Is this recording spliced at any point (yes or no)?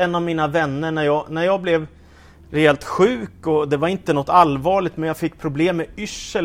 no